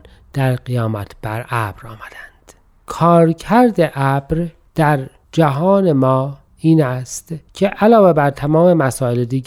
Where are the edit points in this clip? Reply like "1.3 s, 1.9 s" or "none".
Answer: none